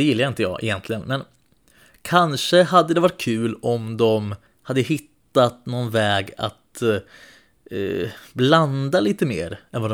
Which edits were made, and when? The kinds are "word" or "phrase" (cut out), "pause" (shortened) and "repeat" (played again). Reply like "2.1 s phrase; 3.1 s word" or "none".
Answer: 4.5 s pause